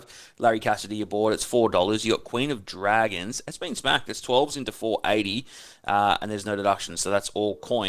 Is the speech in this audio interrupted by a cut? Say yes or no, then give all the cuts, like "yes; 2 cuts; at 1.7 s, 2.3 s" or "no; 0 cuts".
no; 0 cuts